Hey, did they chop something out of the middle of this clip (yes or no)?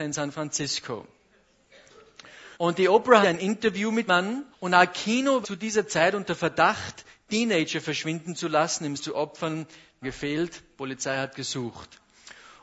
yes